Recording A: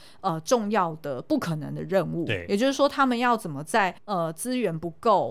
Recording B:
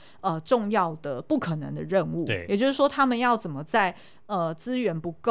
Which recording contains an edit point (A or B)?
A